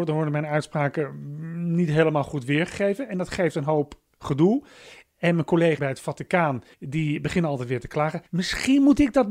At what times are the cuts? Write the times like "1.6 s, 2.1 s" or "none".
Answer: 5.8 s, 6.7 s, 8.3 s